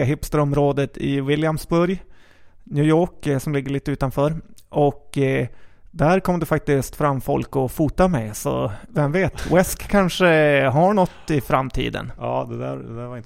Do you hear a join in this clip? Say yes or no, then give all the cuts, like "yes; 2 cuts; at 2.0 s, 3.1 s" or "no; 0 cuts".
no; 0 cuts